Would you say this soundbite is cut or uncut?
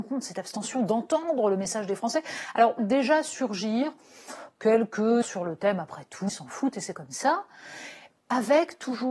cut